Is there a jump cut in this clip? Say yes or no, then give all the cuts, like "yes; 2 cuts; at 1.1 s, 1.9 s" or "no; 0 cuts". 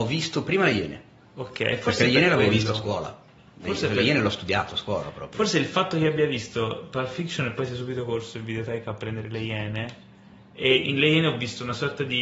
no; 0 cuts